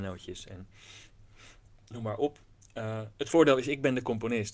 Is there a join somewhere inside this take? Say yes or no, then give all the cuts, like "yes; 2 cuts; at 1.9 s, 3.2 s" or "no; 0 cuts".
no; 0 cuts